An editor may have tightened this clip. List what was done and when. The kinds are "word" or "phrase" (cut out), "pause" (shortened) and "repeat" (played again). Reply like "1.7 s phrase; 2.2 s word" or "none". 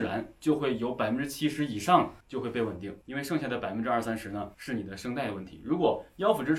2.2 s pause; 3.0 s pause; 4.5 s pause

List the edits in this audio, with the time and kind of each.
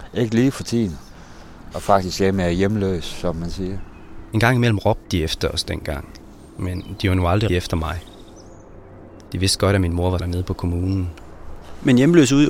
7.5 s word; 10.2 s word

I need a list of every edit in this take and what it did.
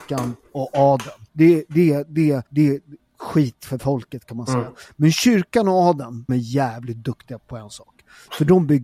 1.3 s pause; 2.5 s pause; 6.3 s word; 7.4 s word

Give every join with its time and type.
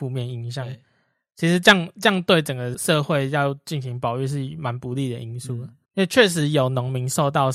5.8 s pause

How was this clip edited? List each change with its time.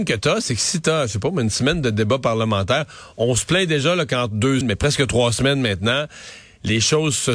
4.6 s word

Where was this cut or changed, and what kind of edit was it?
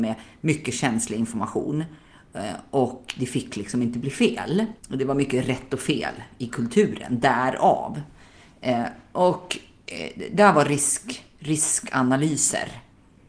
4.8 s pause

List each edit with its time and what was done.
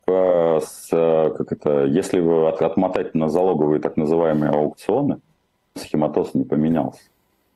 5.8 s word

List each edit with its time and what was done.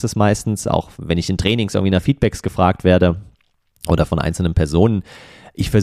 none

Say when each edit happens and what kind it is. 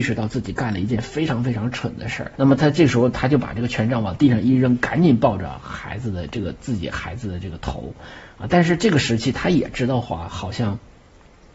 2.3 s pause

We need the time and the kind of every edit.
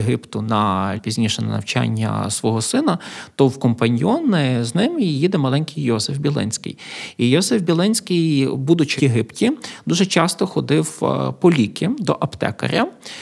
1.0 s word; 9.0 s word

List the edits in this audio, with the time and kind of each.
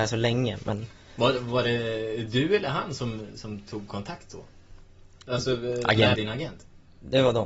6.1 s phrase

